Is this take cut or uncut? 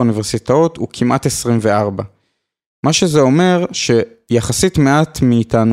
uncut